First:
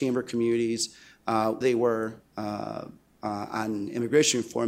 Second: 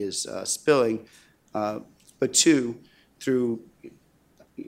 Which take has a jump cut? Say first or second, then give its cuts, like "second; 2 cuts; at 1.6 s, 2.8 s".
first; 2 cuts; at 1.6 s, 2.3 s